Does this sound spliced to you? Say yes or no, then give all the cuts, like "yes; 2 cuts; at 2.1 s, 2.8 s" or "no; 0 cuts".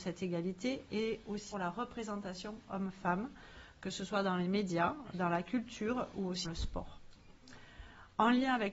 yes; 2 cuts; at 1.5 s, 6.4 s